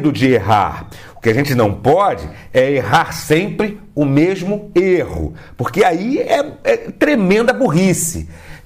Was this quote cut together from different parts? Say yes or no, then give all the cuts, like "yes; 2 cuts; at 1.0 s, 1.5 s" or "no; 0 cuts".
no; 0 cuts